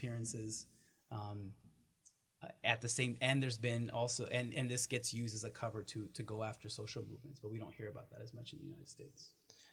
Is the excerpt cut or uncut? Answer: uncut